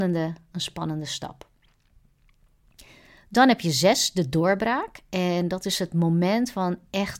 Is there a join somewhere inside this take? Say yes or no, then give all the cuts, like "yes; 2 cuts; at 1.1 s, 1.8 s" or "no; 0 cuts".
no; 0 cuts